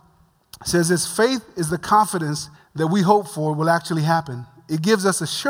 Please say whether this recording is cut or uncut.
cut